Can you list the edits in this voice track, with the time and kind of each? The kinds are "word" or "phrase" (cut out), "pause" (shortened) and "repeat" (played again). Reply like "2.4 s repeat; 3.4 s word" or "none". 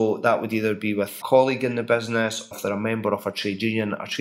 1.2 s word; 2.5 s word